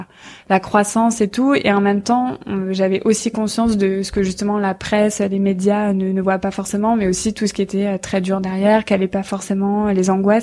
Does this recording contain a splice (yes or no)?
no